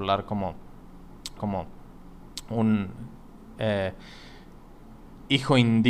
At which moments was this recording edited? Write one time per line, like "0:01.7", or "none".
0:01.4